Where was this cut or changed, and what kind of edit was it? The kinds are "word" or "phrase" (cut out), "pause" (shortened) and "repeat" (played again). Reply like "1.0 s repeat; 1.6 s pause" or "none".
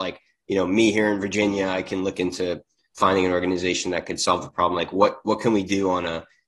none